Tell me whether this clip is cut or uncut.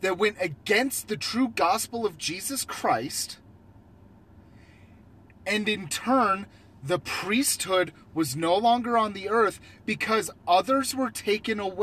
uncut